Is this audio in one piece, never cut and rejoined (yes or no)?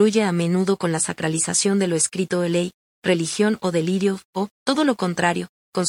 no